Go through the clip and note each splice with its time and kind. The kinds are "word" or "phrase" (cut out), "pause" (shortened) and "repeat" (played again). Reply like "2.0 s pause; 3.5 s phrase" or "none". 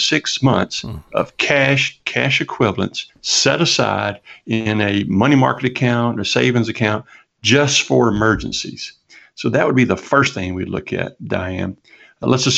3.1 s pause